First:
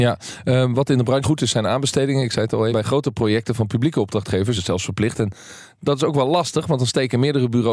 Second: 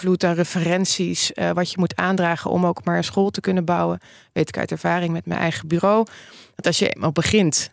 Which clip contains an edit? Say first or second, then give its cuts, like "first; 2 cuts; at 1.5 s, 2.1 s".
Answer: first; 3 cuts; at 1.2 s, 2.7 s, 4.6 s